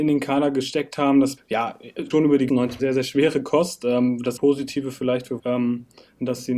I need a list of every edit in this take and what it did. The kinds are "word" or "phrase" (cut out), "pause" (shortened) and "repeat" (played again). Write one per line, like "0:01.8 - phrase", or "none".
0:01.4 - word
0:02.1 - word
0:02.5 - word
0:02.8 - word
0:04.4 - word
0:05.4 - word